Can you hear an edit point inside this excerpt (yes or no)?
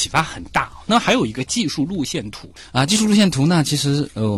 no